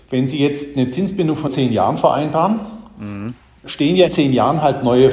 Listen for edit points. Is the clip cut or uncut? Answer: cut